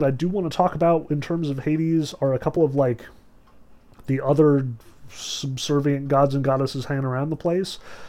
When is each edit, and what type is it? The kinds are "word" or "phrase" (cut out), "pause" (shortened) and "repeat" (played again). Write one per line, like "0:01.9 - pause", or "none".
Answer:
none